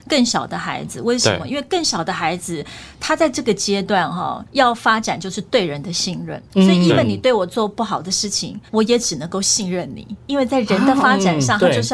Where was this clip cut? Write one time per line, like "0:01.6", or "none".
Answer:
0:04.4
0:06.5
0:08.7

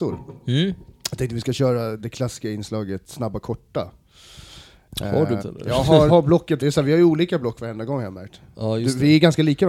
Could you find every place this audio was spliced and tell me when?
0:02.0
0:05.4
0:06.1
0:06.6

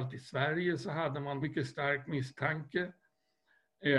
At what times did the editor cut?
0:01.4

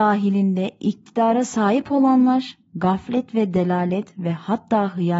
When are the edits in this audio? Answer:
none

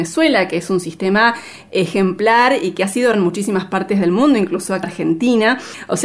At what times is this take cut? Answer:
0:03.1
0:04.8

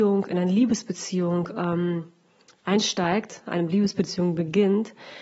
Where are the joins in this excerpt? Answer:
none

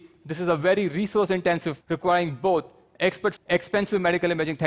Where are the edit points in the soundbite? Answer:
0:01.8
0:03.4

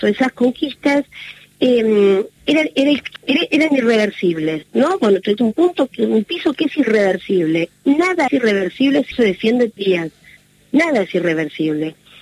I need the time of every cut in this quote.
0:02.4
0:03.2
0:05.4
0:06.3
0:08.3
0:09.1
0:09.8

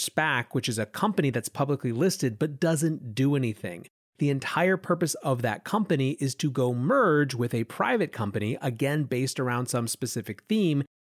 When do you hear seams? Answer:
none

